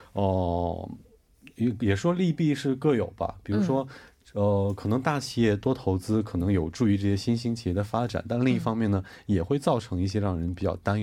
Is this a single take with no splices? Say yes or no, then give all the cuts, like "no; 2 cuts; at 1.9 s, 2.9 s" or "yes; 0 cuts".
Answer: yes; 0 cuts